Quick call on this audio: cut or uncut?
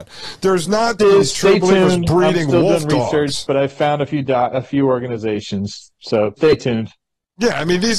cut